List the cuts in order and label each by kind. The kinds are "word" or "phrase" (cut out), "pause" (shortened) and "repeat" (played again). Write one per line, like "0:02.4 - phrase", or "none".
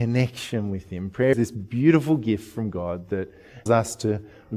0:01.3 - word
0:03.7 - word